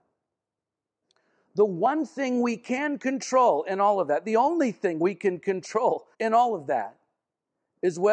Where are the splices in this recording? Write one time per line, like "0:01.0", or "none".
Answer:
0:06.1